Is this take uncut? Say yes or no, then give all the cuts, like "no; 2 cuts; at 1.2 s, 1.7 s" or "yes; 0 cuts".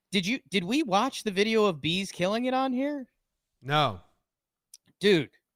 yes; 0 cuts